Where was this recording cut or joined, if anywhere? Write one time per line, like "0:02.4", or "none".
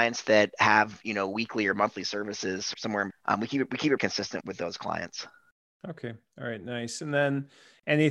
0:02.7
0:03.1
0:04.0
0:04.4